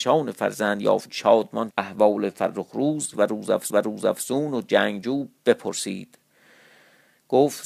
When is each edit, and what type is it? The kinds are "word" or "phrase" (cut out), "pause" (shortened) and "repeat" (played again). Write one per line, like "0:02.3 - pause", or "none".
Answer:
0:01.1 - word
0:01.7 - word
0:03.1 - phrase
0:03.7 - repeat

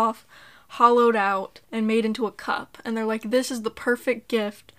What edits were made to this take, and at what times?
0:01.6 - pause

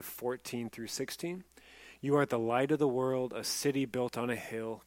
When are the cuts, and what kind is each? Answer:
none

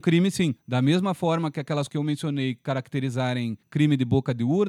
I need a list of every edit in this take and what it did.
0:01.9 - word

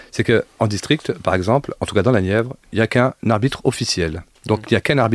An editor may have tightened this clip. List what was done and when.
none

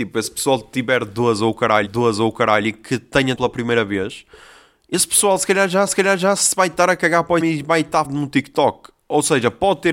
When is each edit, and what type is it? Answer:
0:01.8 - repeat
0:03.3 - word
0:05.9 - repeat
0:07.4 - word
0:08.0 - word

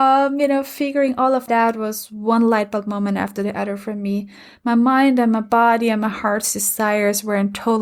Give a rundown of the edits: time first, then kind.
0:01.5 - word

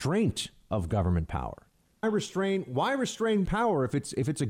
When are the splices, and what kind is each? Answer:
0:02.0 - word
0:03.5 - word

